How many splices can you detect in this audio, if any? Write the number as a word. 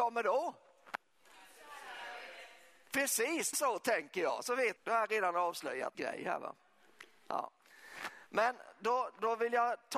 three